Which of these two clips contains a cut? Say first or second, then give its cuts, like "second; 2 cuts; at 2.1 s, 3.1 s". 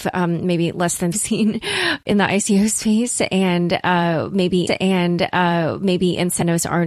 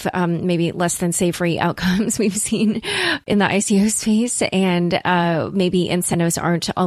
first; 2 cuts; at 1.1 s, 4.7 s